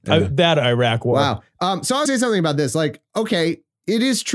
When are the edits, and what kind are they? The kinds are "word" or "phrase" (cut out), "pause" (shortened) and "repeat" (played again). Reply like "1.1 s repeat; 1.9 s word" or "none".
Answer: 2.1 s word; 3.1 s pause